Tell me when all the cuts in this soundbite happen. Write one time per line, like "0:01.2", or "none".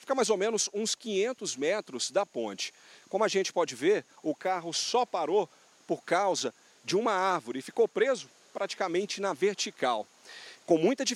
none